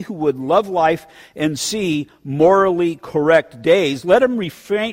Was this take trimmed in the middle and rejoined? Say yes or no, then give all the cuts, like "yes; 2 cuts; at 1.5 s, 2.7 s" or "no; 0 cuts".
no; 0 cuts